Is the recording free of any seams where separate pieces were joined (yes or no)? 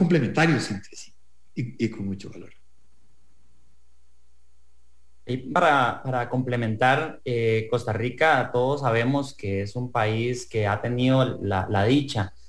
yes